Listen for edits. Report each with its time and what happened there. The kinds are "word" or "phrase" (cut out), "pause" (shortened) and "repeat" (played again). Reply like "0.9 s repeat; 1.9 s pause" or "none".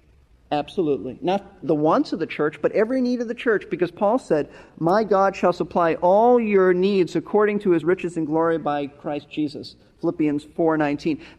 none